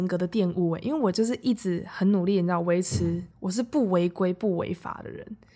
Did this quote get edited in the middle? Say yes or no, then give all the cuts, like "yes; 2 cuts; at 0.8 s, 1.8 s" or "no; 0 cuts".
yes; 1 cut; at 3.3 s